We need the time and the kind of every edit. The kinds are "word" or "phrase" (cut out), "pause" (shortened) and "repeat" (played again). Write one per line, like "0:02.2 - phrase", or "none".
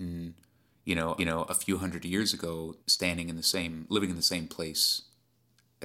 0:01.2 - repeat
0:02.8 - pause

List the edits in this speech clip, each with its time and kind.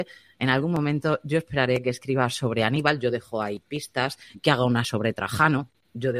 0:04.8 - word

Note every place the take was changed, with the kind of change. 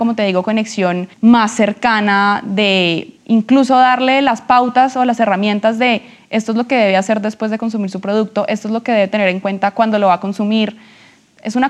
0:01.1 - pause
0:03.2 - pause

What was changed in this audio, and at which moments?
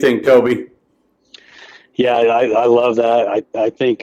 none

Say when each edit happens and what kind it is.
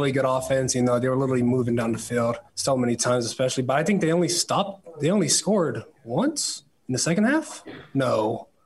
0:02.5 - pause
0:06.7 - pause

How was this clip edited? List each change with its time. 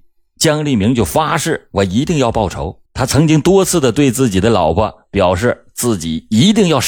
0:02.9 - pause

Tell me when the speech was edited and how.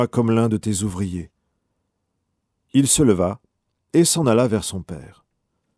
none

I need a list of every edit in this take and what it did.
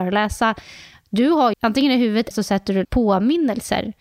0:01.5 - phrase
0:02.3 - word
0:02.8 - word

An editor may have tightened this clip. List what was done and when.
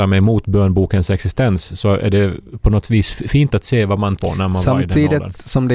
0:04.2 - word

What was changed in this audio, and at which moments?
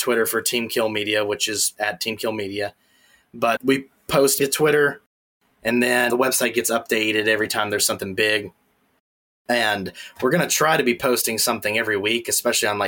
0:01.8 - word
0:03.6 - word
0:04.4 - word
0:06.1 - word

